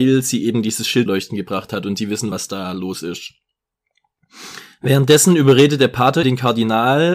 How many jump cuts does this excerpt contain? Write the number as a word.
three